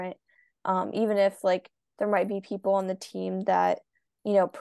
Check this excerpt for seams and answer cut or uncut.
uncut